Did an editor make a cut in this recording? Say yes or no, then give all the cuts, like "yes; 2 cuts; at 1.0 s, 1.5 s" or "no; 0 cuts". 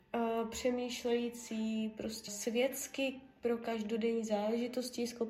yes; 1 cut; at 2.3 s